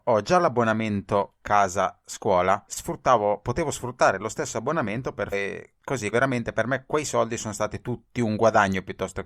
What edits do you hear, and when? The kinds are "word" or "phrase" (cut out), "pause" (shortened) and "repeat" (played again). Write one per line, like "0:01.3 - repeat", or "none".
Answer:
0:02.7 - word
0:05.3 - phrase
0:06.1 - word
0:08.1 - pause